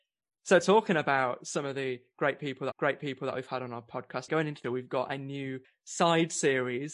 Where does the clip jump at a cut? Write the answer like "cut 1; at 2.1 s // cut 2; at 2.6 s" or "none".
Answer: cut 1; at 2.7 s // cut 2; at 4.3 s // cut 3; at 4.6 s // cut 4; at 5.6 s